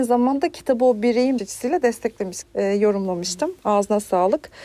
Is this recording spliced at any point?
yes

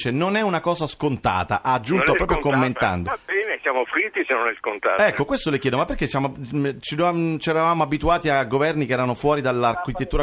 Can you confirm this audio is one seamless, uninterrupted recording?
yes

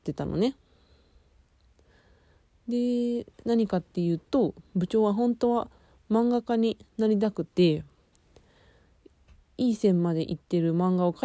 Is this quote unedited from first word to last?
no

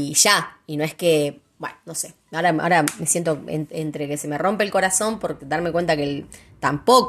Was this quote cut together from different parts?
no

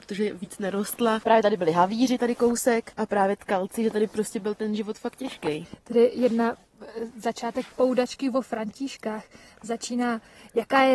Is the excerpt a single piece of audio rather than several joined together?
yes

